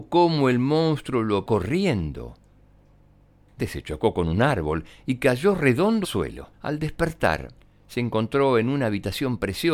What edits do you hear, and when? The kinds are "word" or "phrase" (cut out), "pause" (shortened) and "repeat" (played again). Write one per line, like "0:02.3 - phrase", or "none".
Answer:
0:01.5 - word
0:03.6 - word
0:06.0 - word
0:06.5 - pause
0:07.6 - pause